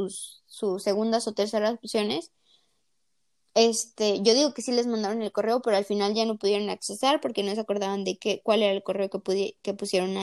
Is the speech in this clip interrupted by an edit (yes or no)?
no